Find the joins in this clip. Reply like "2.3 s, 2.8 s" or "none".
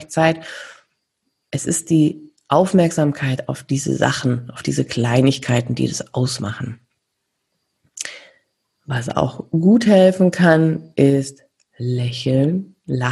none